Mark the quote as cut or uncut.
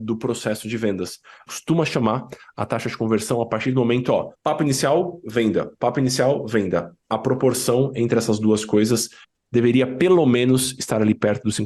cut